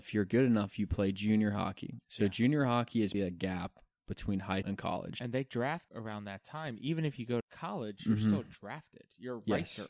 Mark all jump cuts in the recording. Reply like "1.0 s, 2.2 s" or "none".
3.1 s, 4.6 s, 5.9 s, 7.4 s